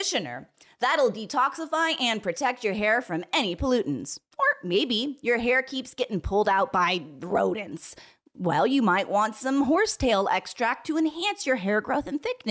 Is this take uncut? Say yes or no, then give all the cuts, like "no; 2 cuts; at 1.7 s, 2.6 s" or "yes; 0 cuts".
yes; 0 cuts